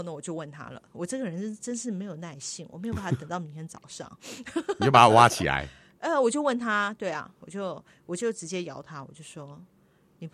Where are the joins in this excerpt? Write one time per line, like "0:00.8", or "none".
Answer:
none